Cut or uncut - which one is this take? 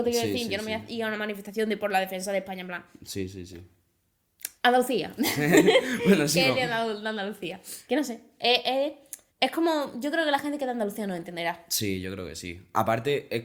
cut